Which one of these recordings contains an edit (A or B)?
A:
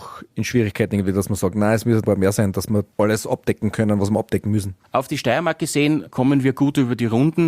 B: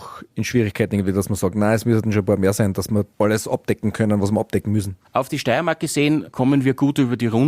A